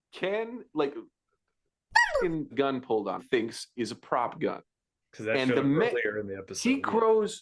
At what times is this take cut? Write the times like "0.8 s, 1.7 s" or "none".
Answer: 2.5 s, 3.2 s